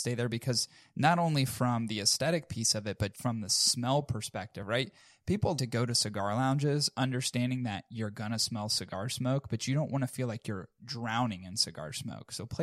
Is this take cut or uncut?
cut